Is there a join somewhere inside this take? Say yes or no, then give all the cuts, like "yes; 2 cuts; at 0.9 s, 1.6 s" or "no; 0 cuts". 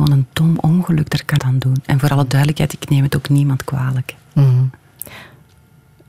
yes; 1 cut; at 1.4 s